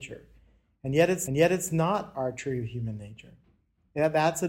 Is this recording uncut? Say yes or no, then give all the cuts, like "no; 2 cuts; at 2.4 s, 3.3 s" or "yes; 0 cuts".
no; 1 cut; at 1.3 s